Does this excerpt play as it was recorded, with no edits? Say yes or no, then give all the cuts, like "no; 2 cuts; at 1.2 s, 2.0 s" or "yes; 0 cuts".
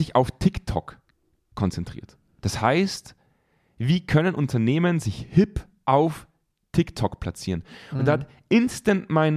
yes; 0 cuts